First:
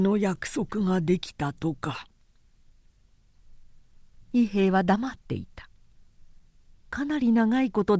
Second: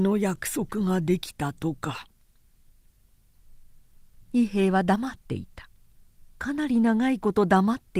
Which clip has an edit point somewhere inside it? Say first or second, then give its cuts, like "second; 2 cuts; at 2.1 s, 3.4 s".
second; 1 cut; at 6.3 s